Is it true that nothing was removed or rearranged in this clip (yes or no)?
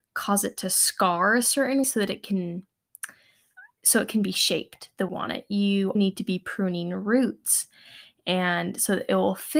no